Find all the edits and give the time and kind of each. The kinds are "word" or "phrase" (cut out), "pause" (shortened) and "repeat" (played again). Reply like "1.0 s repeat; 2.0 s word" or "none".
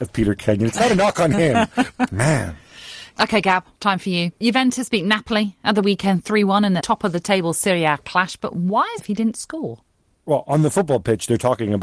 2.1 s word; 3.7 s pause; 4.4 s pause; 6.8 s phrase; 9.0 s phrase